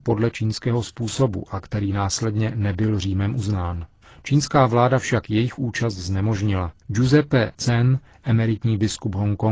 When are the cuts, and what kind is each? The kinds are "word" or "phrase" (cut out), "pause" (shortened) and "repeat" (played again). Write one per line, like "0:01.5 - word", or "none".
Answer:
none